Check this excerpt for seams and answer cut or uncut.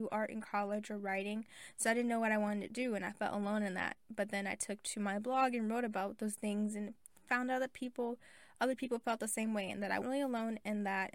cut